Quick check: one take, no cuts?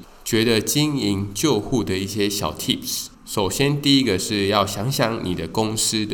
no; 1 cut; at 3.1 s

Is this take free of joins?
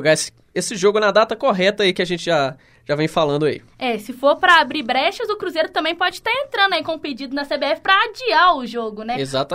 yes; 0 cuts

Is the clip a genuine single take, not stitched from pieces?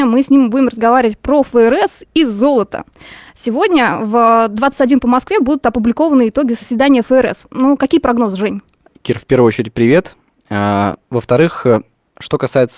yes; 0 cuts

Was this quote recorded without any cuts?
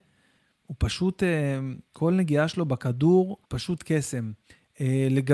no; 1 cut; at 3.4 s

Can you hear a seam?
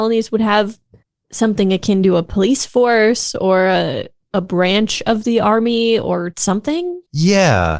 no; 0 cuts

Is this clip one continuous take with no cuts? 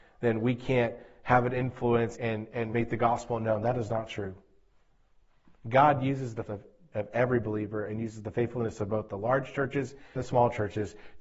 no; 4 cuts; at 2.1 s, 2.7 s, 6.5 s, 10.2 s

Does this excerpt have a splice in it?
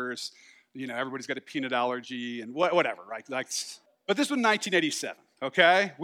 yes; 1 cut; at 3.9 s

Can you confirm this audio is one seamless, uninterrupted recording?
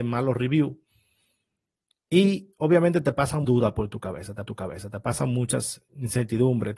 no; 2 cuts; at 3.4 s, 4.5 s

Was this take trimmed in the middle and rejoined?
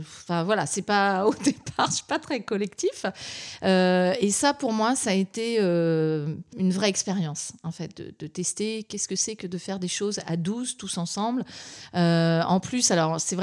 yes; 1 cut; at 6.5 s

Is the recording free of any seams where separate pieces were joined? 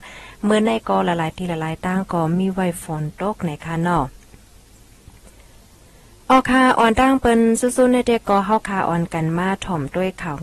yes; 0 cuts

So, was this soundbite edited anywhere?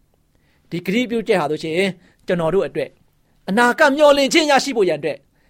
no; 0 cuts

